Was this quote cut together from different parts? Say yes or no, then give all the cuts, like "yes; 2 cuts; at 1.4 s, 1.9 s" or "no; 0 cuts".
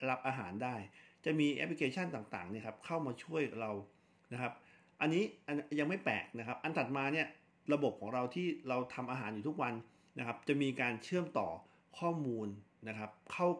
no; 0 cuts